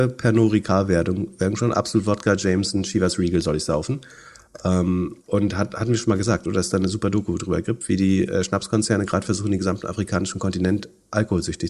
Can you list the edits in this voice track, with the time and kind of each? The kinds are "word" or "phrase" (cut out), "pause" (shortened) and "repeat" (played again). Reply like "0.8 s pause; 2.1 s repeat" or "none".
5.2 s pause